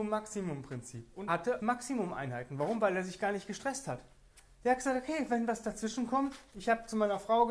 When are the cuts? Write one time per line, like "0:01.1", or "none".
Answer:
0:01.3
0:01.6